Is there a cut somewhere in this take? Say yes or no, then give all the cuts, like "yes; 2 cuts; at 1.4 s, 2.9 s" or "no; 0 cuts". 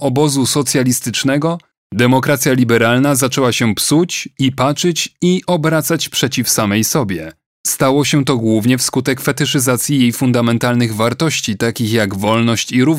no; 0 cuts